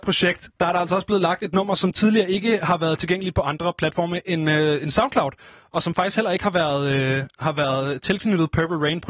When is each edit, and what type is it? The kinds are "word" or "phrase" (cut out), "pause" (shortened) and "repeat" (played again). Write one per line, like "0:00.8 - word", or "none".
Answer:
none